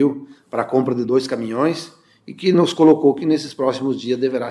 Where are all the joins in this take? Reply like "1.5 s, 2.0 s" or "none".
none